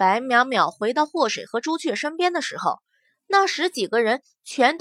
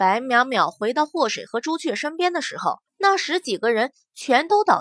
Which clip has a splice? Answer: second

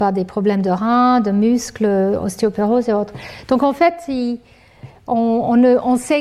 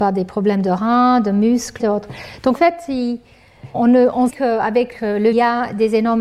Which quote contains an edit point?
second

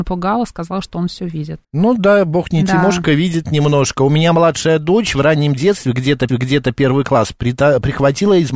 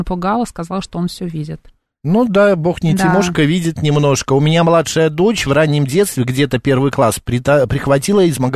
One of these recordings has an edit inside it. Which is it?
first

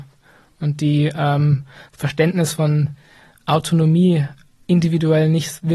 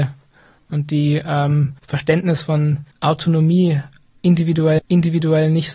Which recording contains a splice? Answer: second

